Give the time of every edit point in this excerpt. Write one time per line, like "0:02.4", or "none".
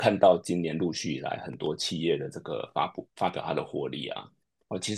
none